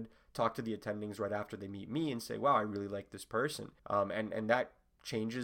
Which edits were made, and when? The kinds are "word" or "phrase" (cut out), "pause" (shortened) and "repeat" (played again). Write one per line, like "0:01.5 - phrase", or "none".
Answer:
0:03.8 - pause